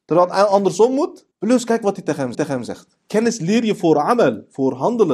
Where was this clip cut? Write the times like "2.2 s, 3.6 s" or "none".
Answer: 1.3 s, 2.3 s